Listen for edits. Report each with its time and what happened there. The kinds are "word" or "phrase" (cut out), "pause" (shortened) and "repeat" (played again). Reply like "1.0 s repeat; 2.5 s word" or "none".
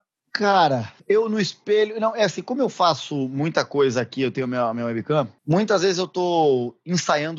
1.0 s pause; 5.4 s pause